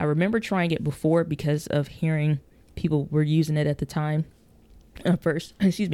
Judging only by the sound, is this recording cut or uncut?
uncut